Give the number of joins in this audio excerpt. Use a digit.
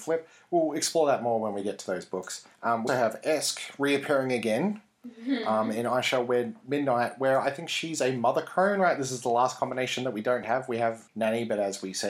3